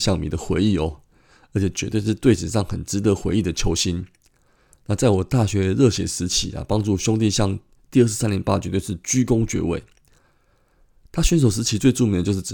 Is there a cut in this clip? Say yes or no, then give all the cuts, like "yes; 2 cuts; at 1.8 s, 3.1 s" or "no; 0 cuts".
no; 0 cuts